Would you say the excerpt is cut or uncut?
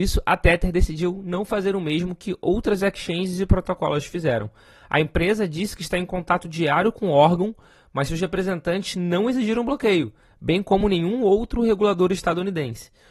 uncut